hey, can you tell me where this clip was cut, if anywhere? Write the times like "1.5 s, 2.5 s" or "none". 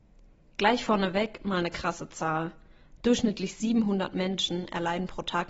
none